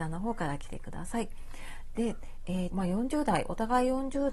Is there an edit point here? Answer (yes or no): yes